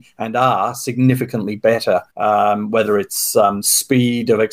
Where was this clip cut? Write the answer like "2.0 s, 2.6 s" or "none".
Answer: 2.1 s